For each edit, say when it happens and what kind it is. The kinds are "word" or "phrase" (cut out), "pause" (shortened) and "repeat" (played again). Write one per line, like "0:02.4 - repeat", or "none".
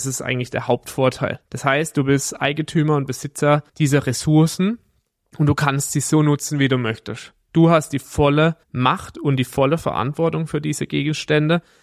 0:01.5 - pause
0:03.7 - pause
0:08.6 - pause